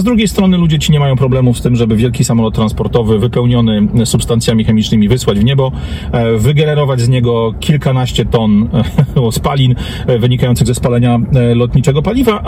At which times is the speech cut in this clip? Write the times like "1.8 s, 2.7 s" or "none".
none